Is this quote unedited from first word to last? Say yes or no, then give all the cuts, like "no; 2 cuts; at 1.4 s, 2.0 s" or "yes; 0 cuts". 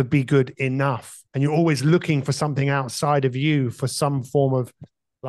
no; 1 cut; at 1.3 s